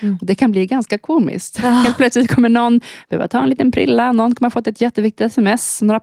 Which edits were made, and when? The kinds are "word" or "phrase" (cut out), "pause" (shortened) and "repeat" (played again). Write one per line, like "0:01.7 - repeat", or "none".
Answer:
none